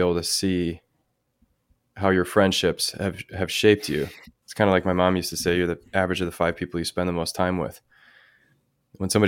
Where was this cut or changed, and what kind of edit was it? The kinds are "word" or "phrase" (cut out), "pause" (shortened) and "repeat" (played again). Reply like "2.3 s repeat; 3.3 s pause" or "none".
none

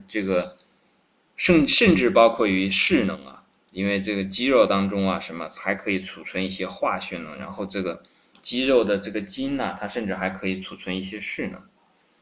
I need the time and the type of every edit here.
none

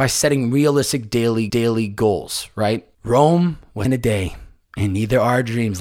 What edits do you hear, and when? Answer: 1.5 s repeat; 2.9 s pause; 3.8 s phrase

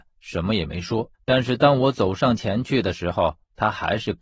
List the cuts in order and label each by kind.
1.1 s pause

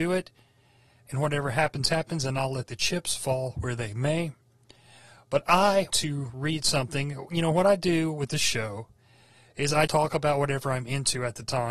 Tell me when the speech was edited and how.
5.9 s word; 9.9 s word

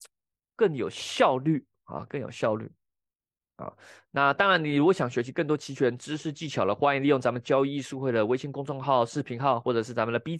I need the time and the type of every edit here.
none

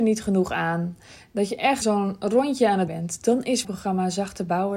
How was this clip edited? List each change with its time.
1.8 s word; 2.9 s word; 3.6 s word

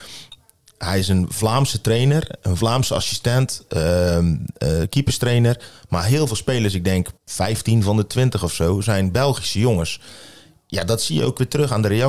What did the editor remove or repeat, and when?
7.2 s pause

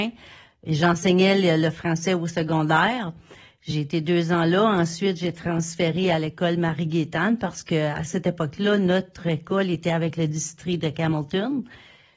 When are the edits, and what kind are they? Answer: none

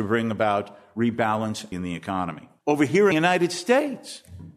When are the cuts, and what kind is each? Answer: 1.7 s phrase; 2.6 s pause; 3.1 s phrase

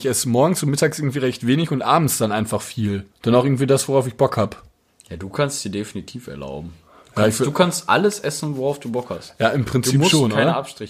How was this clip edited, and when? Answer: 3.1 s pause; 4.9 s pause

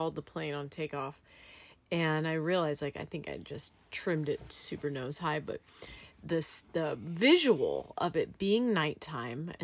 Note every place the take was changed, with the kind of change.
none

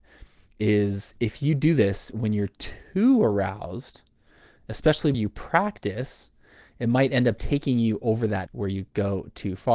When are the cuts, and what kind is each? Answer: 5.1 s word; 8.5 s word

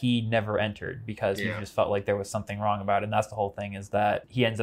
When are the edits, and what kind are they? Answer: none

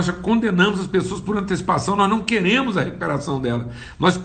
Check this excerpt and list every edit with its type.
none

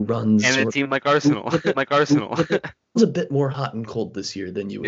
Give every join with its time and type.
1.7 s repeat; 3.0 s word

